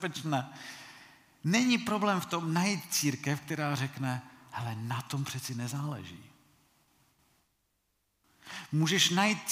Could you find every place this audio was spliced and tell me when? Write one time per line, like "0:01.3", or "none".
none